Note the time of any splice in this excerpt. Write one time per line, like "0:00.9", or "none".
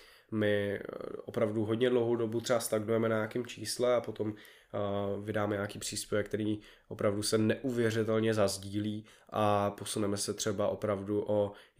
none